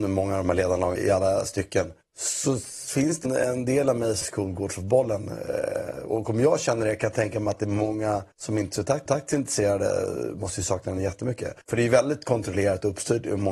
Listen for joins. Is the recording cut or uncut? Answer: cut